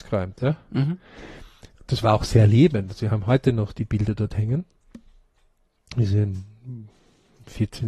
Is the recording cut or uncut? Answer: uncut